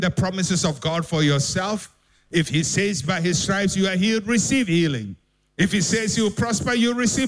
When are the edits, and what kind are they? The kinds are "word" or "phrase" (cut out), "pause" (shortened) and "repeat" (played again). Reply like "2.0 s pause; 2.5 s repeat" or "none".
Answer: none